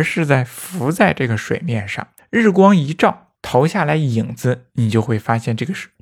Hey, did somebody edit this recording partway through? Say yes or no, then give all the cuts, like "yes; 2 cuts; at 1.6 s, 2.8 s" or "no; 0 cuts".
yes; 2 cuts; at 2.2 s, 3.3 s